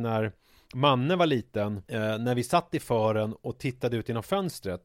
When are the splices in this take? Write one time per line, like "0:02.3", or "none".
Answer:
0:01.9